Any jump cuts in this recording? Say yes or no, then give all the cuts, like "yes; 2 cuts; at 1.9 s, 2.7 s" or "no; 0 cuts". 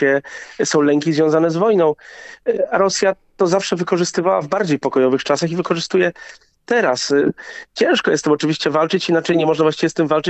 no; 0 cuts